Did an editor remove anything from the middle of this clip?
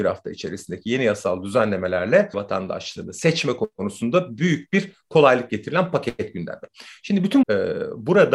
yes; 2 cuts; at 2.3 s, 7.4 s

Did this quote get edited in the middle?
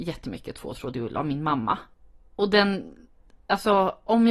no; 0 cuts

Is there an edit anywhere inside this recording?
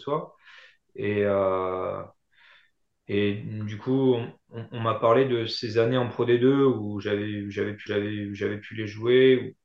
yes; 1 cut; at 7.9 s

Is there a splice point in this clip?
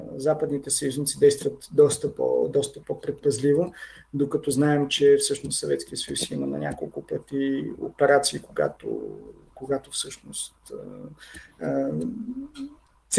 no; 0 cuts

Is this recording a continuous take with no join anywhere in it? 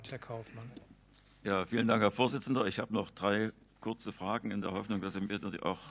yes; 0 cuts

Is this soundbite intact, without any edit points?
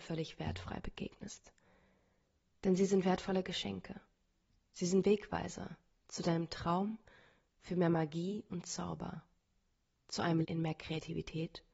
no; 1 cut; at 10.4 s

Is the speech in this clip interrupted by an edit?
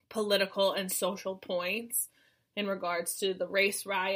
no; 0 cuts

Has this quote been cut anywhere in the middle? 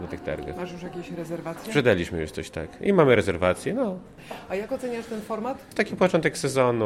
no; 0 cuts

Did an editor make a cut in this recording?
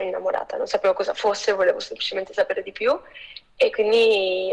no; 0 cuts

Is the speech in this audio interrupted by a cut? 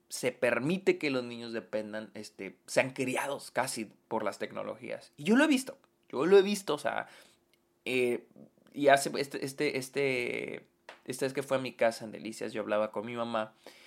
no; 0 cuts

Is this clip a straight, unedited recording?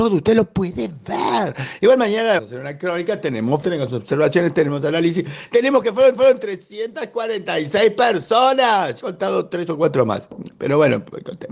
no; 4 cuts; at 2.4 s, 3.6 s, 6.2 s, 9.0 s

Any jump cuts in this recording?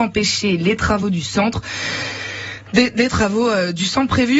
no; 0 cuts

